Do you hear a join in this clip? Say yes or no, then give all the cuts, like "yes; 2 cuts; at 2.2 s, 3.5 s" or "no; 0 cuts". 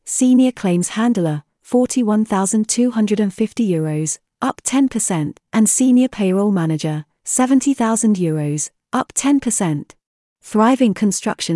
yes; 1 cut; at 10.1 s